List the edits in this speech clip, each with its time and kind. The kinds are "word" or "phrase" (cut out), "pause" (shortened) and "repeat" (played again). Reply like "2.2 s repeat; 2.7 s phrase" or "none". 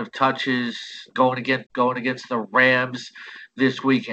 1.1 s word; 1.7 s word

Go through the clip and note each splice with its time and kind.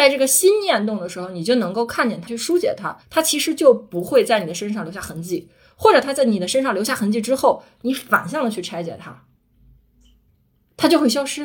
2.3 s phrase; 3.0 s pause

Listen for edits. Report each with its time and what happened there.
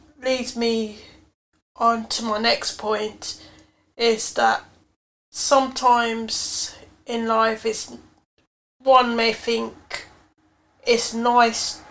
none

